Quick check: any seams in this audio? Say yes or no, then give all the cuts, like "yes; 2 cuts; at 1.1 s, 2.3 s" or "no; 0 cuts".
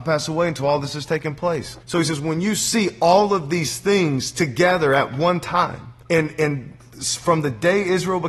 yes; 2 cuts; at 1.8 s, 6.0 s